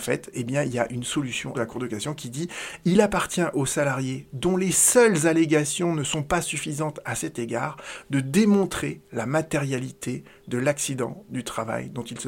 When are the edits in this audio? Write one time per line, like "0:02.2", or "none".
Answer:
0:01.5